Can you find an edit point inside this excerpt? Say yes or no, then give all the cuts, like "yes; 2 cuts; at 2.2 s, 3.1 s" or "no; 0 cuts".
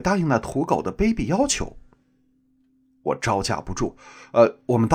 no; 0 cuts